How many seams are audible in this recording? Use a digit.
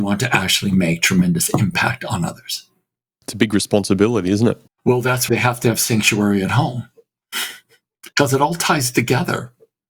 3